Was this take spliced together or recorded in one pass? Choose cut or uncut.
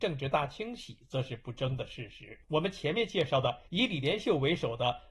cut